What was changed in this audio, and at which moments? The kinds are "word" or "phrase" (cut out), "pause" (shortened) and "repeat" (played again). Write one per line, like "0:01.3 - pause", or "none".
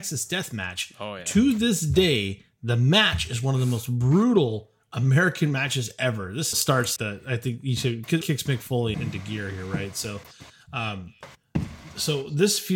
0:06.5 - phrase
0:07.0 - word
0:08.2 - word
0:08.9 - word